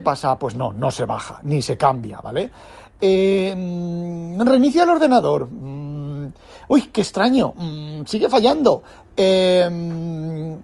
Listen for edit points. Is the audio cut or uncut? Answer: uncut